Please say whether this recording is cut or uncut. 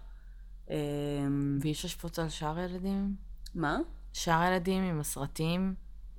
uncut